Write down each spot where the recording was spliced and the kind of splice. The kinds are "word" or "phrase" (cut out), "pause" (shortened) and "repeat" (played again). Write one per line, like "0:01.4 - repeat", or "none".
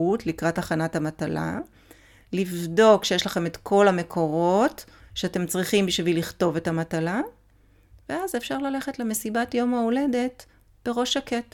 0:05.0 - pause